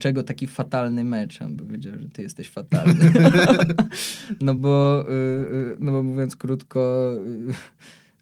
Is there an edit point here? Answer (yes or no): no